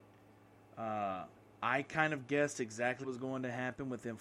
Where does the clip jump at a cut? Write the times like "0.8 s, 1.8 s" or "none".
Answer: 1.4 s, 3.0 s